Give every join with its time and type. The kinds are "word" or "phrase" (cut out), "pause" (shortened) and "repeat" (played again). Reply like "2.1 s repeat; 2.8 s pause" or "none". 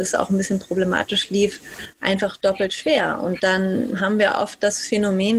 none